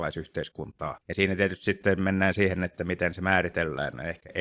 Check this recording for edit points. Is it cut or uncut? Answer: cut